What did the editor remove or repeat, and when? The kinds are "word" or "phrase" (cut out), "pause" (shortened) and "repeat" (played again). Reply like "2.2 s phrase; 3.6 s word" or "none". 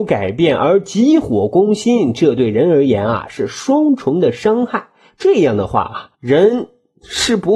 6.1 s pause